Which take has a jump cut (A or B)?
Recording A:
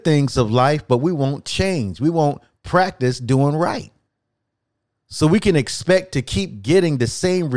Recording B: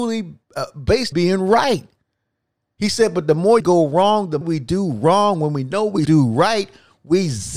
B